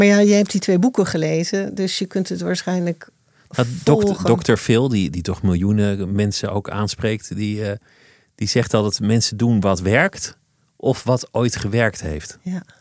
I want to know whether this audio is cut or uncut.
uncut